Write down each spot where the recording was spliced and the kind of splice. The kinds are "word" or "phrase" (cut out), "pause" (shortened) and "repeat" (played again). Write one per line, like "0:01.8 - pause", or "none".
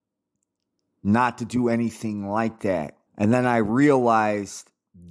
0:03.1 - pause